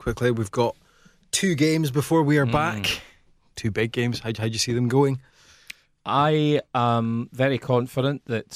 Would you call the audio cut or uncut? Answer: uncut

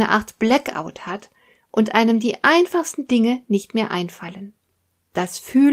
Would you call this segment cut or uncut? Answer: uncut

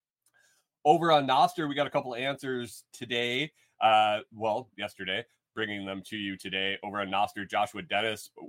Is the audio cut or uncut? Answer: uncut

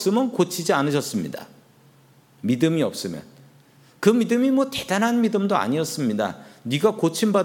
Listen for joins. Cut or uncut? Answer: uncut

